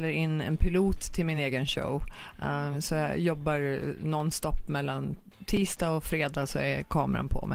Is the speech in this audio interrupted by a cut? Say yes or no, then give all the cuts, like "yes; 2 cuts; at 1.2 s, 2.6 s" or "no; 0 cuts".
no; 0 cuts